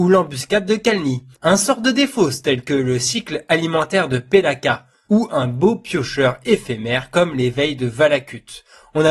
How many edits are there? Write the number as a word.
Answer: one